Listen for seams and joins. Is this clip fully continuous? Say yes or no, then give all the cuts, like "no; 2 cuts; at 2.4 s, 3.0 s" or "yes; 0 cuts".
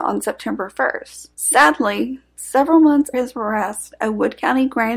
no; 2 cuts; at 1.3 s, 3.1 s